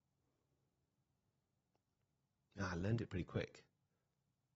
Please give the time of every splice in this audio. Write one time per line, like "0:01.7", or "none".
none